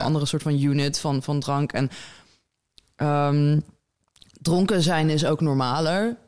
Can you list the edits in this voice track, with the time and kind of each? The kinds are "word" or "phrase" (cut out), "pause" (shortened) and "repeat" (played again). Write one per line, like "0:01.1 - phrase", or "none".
none